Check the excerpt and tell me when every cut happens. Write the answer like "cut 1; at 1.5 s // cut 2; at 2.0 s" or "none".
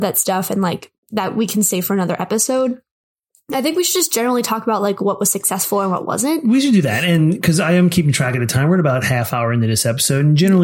none